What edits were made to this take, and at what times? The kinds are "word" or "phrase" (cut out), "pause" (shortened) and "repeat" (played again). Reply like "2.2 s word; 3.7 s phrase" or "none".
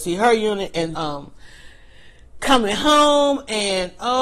0.9 s word